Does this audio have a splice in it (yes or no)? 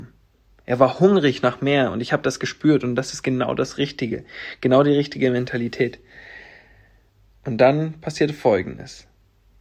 no